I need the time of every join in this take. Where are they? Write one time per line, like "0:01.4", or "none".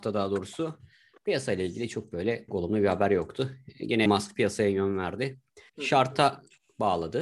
0:02.5
0:04.1
0:05.7

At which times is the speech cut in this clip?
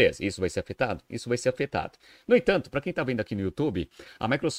none

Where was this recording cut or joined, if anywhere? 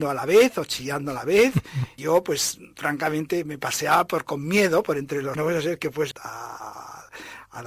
0:02.0
0:05.3
0:06.1

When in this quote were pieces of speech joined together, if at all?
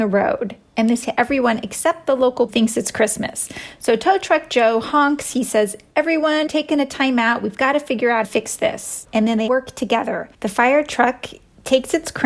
0:01.0
0:02.5
0:06.5
0:08.2
0:09.5
0:10.3

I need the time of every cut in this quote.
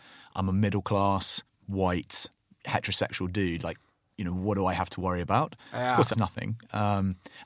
0:06.1

